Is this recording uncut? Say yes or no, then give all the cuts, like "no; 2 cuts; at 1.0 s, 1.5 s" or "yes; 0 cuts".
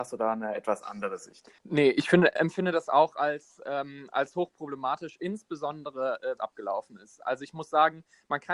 no; 3 cuts; at 1.6 s, 2.4 s, 6.4 s